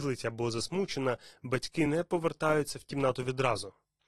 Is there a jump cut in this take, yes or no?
no